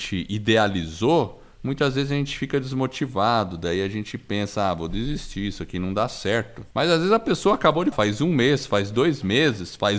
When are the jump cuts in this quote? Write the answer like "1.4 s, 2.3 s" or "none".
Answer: 6.7 s, 7.9 s